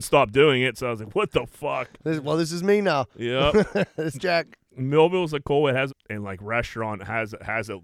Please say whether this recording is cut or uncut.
cut